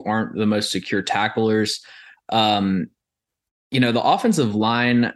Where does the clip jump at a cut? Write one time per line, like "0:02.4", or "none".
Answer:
none